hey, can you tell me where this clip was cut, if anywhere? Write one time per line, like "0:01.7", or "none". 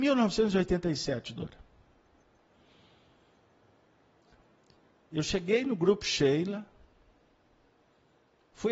none